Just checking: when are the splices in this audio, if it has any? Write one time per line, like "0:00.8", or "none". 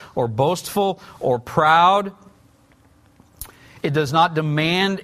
none

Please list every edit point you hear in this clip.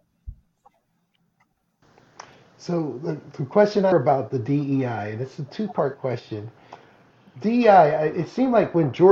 0:03.9

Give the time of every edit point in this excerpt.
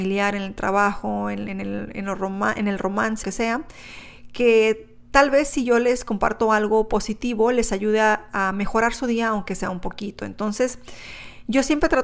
0:03.2

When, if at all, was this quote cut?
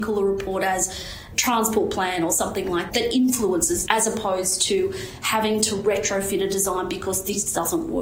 0:02.9
0:03.9

